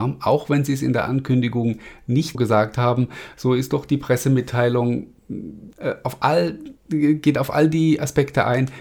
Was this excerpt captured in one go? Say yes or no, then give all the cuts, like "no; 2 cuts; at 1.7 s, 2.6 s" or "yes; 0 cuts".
no; 3 cuts; at 2.3 s, 5.7 s, 6.8 s